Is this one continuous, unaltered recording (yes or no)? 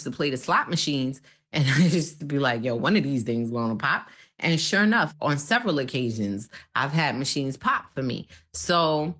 yes